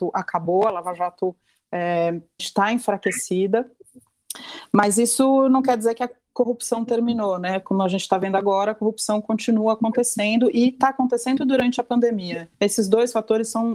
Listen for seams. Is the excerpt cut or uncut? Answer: cut